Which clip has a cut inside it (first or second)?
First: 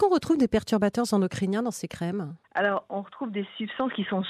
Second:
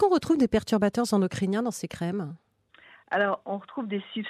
first